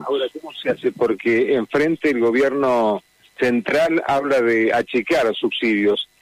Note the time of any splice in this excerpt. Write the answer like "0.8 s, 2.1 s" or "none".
none

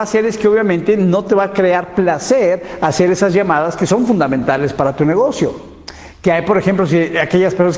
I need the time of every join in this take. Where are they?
none

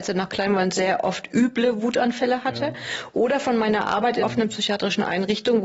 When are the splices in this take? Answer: 4.2 s

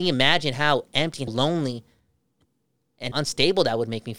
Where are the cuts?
1.3 s, 3.1 s

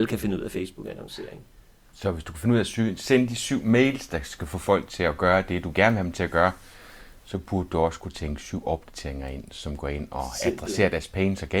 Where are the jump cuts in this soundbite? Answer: none

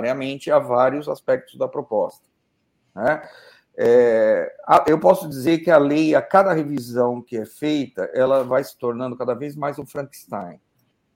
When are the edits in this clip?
none

